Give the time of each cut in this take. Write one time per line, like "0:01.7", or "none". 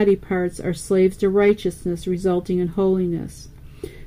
none